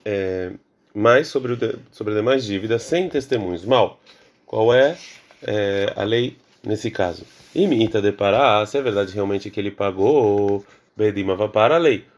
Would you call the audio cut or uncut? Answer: uncut